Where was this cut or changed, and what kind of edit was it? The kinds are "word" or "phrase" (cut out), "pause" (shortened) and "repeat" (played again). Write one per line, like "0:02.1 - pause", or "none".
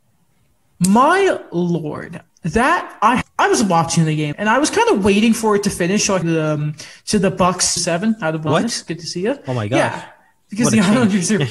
0:02.3 - pause
0:03.2 - word
0:04.3 - word
0:06.2 - phrase
0:07.8 - phrase
0:08.5 - word